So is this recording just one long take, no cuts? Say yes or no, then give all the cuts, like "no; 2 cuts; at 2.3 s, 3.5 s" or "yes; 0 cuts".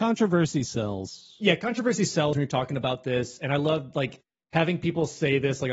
yes; 0 cuts